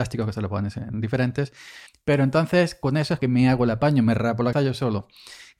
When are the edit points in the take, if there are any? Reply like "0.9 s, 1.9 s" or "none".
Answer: 1.9 s, 3.2 s, 4.5 s